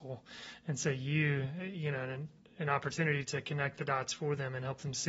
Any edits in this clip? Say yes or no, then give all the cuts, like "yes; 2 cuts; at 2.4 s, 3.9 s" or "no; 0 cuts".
no; 0 cuts